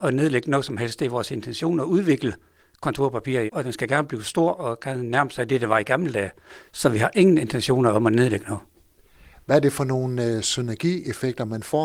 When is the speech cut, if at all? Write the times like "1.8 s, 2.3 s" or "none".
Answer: 3.5 s